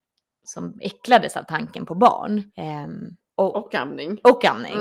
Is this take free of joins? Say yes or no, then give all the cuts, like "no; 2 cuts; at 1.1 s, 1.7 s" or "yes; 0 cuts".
no; 1 cut; at 2.5 s